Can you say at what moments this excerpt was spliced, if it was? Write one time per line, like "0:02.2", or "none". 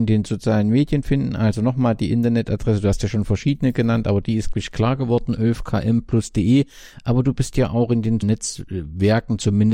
0:04.5
0:08.2